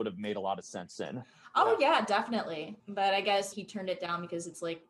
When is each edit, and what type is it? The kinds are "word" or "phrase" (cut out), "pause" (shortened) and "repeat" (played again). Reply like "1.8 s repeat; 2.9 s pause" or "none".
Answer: 3.5 s word